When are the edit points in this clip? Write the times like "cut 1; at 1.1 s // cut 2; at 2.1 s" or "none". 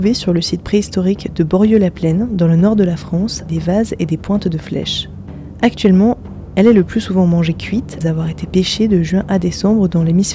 cut 1; at 3.5 s // cut 2; at 8.0 s